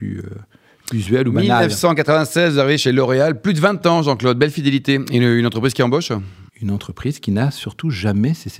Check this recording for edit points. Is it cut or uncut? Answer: cut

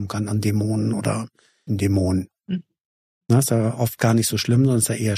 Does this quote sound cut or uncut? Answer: cut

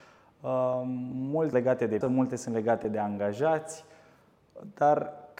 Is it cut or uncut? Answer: cut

